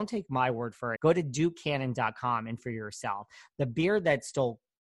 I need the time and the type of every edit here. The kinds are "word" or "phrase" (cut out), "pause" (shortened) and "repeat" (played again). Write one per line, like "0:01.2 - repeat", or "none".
0:01.0 - word
0:02.6 - word